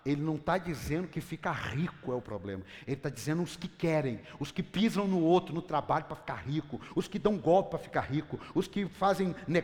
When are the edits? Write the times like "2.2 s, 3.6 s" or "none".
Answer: none